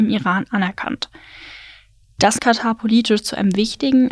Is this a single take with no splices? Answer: no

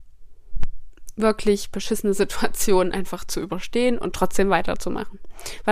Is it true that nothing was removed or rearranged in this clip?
yes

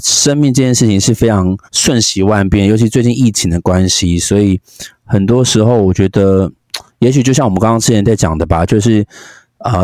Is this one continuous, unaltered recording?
no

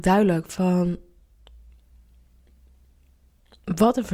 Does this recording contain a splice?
no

